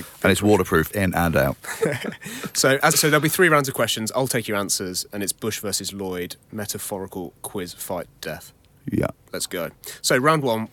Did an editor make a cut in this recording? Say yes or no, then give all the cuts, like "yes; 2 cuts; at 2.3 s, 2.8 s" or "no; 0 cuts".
yes; 3 cuts; at 0.9 s, 2.9 s, 8.2 s